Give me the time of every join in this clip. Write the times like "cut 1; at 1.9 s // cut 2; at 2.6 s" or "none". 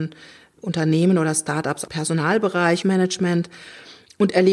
cut 1; at 1.9 s // cut 2; at 2.8 s

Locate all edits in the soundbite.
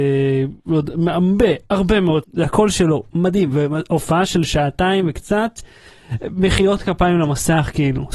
cut 1; at 2.2 s

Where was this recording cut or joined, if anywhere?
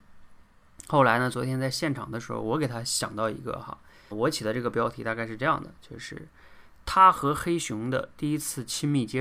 cut 1; at 4.1 s

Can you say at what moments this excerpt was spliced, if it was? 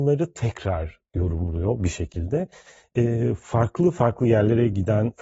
none

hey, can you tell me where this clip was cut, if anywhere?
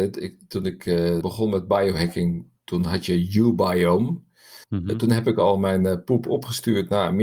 cut 1; at 1.2 s // cut 2; at 4.6 s

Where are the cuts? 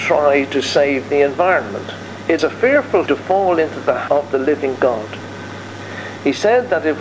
cut 1; at 2.4 s // cut 2; at 3.1 s // cut 3; at 4.1 s

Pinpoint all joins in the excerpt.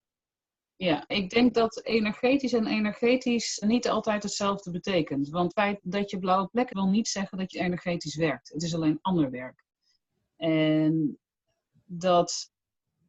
cut 1; at 1.1 s // cut 2; at 1.8 s // cut 3; at 3.6 s // cut 4; at 5.5 s // cut 5; at 6.7 s // cut 6; at 7.5 s

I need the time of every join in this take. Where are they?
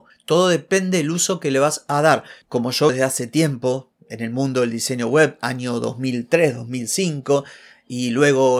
cut 1; at 2.9 s

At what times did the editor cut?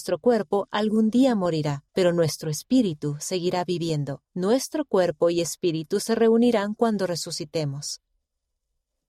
cut 1; at 1.9 s // cut 2; at 4.3 s

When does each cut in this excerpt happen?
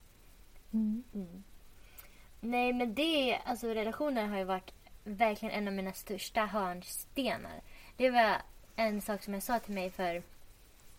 none

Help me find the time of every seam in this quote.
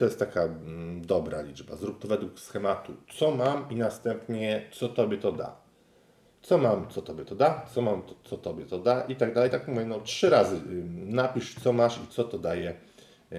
none

